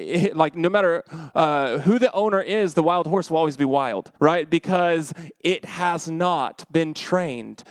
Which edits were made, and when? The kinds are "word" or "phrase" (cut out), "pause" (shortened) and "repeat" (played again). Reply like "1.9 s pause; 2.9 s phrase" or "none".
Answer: 4.2 s pause